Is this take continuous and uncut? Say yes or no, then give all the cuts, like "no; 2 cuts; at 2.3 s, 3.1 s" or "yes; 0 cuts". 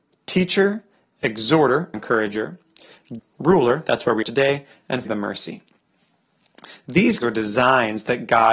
no; 5 cuts; at 1.9 s, 3.2 s, 4.2 s, 5.1 s, 7.2 s